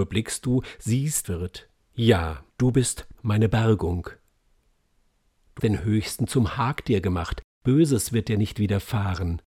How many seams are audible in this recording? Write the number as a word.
four